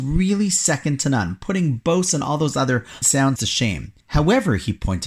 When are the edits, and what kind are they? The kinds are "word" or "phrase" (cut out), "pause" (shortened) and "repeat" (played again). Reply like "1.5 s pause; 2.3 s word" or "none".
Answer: 3.0 s word; 3.4 s word; 4.0 s pause